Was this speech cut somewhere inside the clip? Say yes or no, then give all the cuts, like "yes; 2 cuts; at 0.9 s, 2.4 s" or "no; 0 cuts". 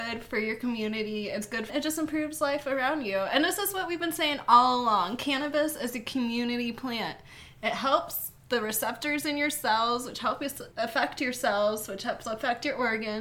yes; 3 cuts; at 1.7 s, 8.4 s, 10.7 s